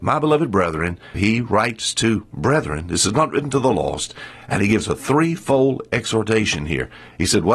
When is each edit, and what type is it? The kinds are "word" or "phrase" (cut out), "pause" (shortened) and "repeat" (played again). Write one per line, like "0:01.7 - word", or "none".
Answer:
0:01.1 - word